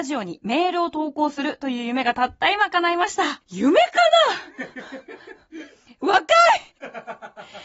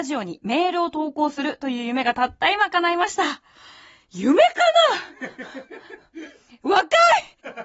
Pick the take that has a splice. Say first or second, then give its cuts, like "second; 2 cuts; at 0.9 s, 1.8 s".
first; 1 cut; at 3.4 s